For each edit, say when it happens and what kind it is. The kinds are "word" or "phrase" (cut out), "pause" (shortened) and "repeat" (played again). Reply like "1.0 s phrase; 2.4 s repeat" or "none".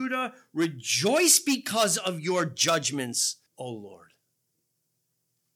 3.5 s pause